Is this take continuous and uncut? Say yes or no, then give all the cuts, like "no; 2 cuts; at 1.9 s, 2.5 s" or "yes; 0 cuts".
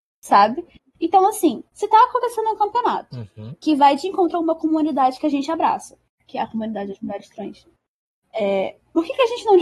no; 1 cut; at 1.7 s